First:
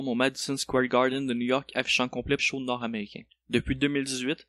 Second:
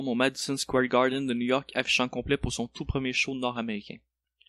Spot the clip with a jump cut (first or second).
first